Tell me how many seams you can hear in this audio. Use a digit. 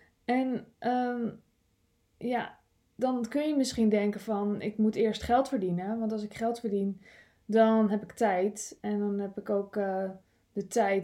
0